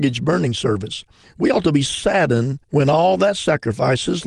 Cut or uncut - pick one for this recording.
cut